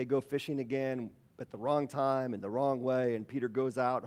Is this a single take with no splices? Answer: yes; 0 cuts

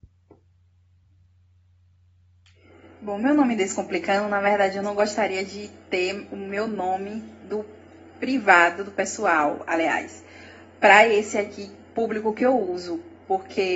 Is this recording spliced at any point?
no; 0 cuts

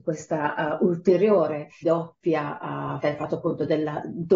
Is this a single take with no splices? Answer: no; 2 cuts; at 1.8 s, 3.0 s

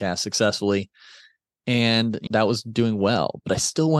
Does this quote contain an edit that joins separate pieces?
yes; 1 cut; at 2.3 s

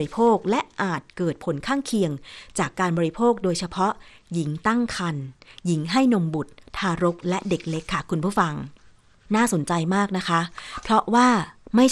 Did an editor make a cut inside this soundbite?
no; 0 cuts

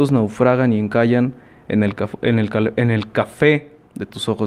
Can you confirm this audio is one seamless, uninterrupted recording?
yes; 0 cuts

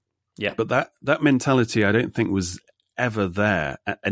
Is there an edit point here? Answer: no; 0 cuts

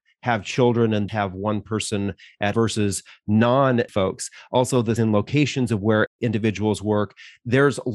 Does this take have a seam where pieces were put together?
yes; 4 cuts; at 1.1 s, 2.5 s, 3.9 s, 5.0 s

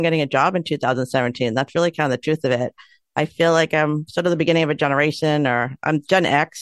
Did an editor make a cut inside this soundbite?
no; 0 cuts

